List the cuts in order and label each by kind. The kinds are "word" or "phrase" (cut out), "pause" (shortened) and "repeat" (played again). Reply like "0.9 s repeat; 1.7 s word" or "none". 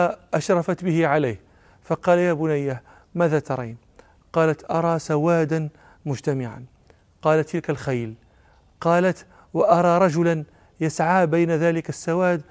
none